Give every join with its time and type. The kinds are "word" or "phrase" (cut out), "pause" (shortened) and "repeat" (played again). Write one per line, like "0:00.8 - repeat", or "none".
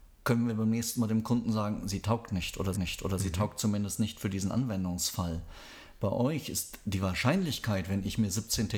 0:02.7 - repeat